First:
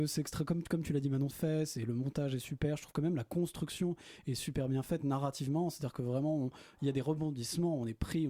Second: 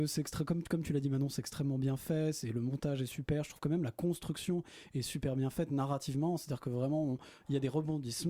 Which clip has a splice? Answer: first; 1 cut; at 1.3 s

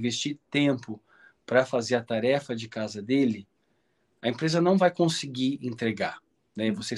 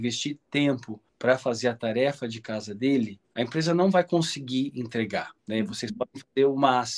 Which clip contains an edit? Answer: second; 3 cuts; at 1.1 s, 3.2 s, 5.4 s

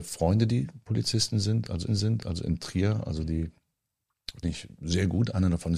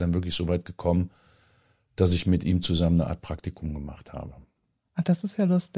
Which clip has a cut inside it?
first; 2 cuts; at 1.9 s, 4.4 s

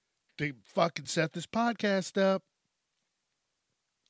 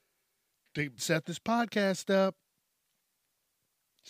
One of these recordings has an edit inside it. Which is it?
second; 1 cut; at 1.0 s

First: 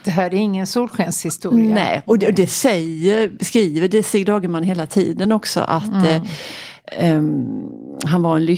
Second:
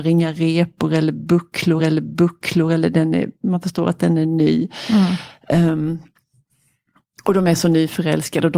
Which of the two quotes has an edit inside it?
second; 1 cut; at 1.8 s

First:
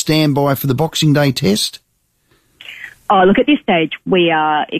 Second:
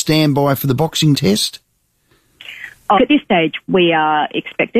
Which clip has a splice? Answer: second; 2 cuts; at 1.1 s, 3.0 s

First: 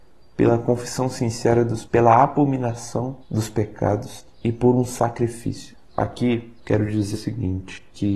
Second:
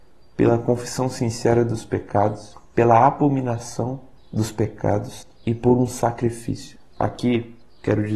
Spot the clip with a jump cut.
first; 4 cuts; at 1.9 s, 3.2 s, 6.6 s, 7.1 s

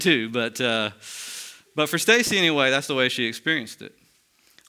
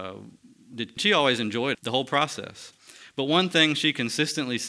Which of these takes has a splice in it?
second; 2 cuts; at 1.0 s, 1.7 s

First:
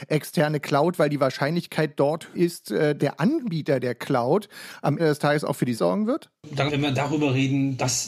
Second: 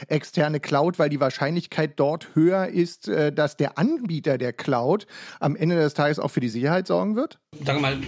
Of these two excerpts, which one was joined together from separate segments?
first; 5 cuts; at 2.3 s, 3.0 s, 5.0 s, 5.7 s, 6.7 s

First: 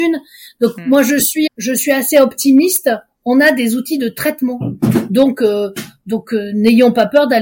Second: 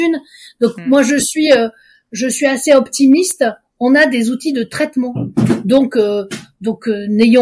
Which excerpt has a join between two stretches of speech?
first; 1 cut; at 1.5 s

